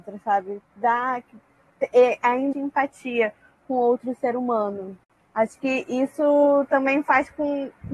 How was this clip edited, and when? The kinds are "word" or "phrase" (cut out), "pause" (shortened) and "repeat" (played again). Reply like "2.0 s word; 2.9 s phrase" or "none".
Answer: 2.5 s word